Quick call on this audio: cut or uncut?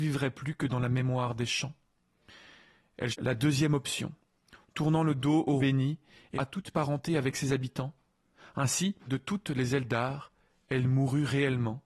cut